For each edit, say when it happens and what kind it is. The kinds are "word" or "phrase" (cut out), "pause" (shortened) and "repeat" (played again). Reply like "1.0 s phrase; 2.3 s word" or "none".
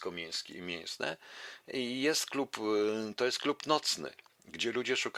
none